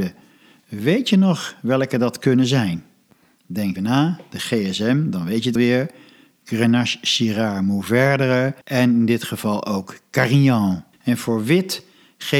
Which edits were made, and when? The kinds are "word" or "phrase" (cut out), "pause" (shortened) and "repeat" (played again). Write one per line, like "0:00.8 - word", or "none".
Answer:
0:03.8 - word
0:05.6 - word
0:08.6 - pause
0:10.9 - pause